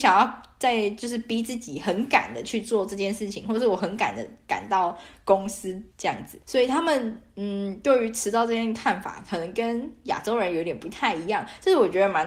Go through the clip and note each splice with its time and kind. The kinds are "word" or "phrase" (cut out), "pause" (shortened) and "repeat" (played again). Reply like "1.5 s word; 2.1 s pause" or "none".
5.9 s pause; 6.4 s pause